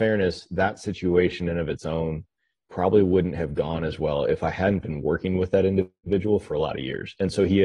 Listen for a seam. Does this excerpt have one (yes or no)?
no